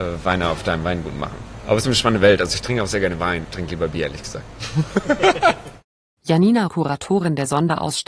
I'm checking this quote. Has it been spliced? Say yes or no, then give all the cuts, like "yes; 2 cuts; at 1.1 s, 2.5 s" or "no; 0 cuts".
yes; 3 cuts; at 1.8 s, 3.4 s, 6.7 s